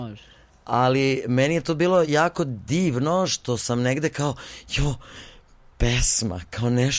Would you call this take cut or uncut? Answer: uncut